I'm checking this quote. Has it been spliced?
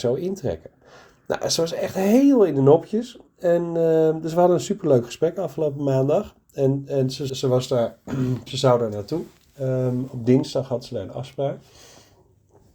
yes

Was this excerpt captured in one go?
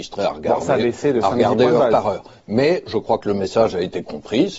yes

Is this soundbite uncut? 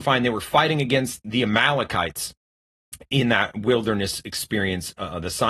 yes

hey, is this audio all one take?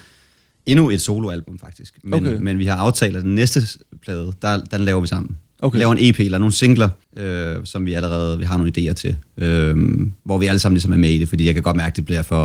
no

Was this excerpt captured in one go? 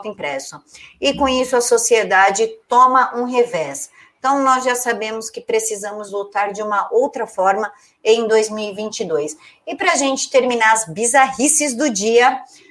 yes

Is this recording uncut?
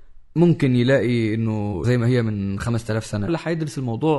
no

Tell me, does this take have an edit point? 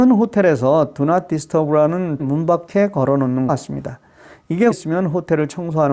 yes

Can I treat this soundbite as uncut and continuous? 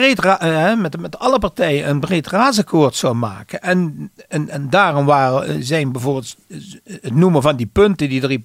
yes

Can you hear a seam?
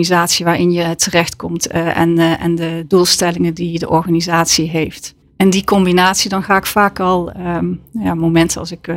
yes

